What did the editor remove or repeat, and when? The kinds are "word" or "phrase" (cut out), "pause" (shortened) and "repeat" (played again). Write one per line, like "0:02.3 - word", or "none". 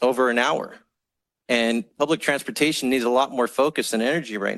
none